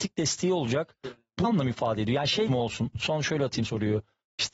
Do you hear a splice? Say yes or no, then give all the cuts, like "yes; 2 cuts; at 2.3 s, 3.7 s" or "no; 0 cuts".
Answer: yes; 3 cuts; at 1.4 s, 2.5 s, 3.6 s